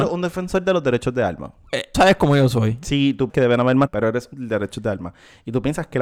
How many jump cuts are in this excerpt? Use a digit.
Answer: 4